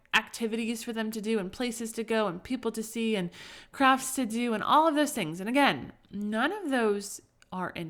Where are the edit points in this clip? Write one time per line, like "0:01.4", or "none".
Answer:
none